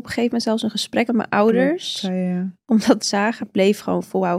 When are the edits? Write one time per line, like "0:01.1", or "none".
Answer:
0:01.1
0:03.0
0:03.4